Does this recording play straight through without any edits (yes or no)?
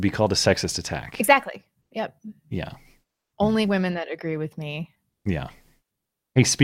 yes